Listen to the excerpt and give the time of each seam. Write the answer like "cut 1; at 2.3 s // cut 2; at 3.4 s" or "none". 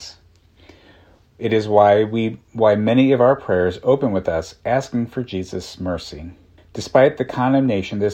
cut 1; at 2.5 s // cut 2; at 6.6 s